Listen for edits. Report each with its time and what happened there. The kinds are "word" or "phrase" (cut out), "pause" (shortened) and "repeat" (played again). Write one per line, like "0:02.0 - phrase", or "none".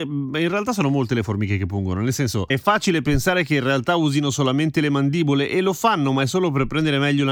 none